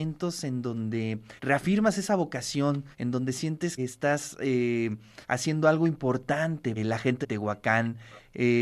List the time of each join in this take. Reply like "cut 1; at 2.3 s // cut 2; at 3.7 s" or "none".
cut 1; at 1.4 s // cut 2; at 2.9 s // cut 3; at 3.8 s // cut 4; at 5.2 s // cut 5; at 6.8 s // cut 6; at 7.2 s